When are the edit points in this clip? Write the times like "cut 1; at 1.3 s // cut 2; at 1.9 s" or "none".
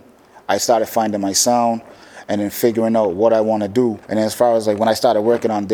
cut 1; at 4.0 s